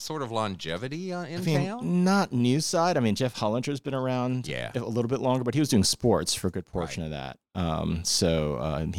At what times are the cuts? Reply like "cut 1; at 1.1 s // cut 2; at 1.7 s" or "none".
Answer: none